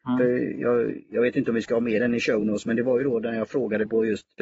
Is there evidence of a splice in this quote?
no; 0 cuts

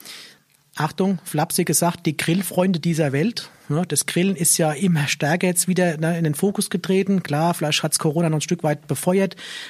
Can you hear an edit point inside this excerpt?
no; 0 cuts

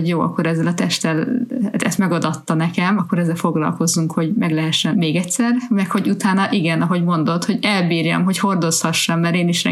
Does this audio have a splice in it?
yes; 2 cuts; at 3.0 s, 4.9 s

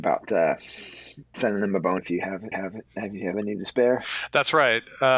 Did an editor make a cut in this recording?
yes; 4 cuts; at 1.3 s, 2.0 s, 2.5 s, 3.3 s

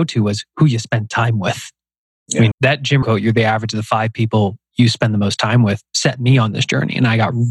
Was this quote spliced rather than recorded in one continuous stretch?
yes; 2 cuts; at 2.5 s, 3.0 s

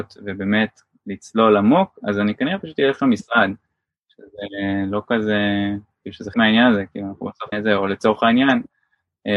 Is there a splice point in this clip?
yes; 2 cuts; at 6.3 s, 7.5 s

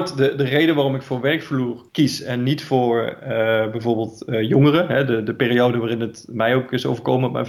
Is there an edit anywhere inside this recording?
yes; 1 cut; at 1.9 s

